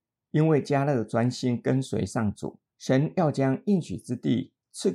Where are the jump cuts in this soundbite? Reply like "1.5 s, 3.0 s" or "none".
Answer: 2.7 s